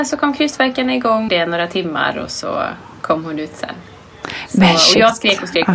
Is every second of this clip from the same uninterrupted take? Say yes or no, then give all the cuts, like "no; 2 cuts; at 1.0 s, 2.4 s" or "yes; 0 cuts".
no; 1 cut; at 1.3 s